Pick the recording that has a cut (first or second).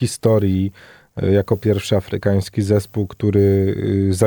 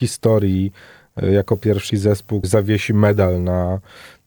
second